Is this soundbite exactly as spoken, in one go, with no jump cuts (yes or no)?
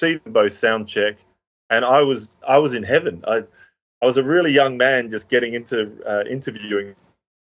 yes